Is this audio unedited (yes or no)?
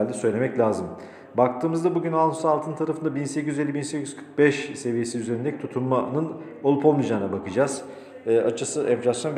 yes